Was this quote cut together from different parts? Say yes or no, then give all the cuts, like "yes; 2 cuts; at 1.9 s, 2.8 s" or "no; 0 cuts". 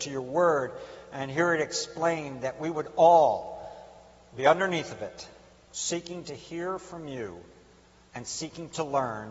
no; 0 cuts